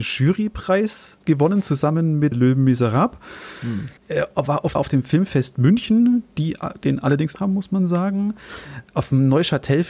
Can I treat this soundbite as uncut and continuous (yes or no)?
no